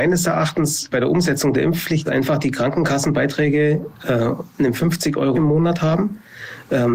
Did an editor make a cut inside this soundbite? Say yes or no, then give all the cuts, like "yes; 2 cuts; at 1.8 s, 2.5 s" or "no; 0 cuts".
yes; 3 cuts; at 0.9 s, 2.1 s, 5.3 s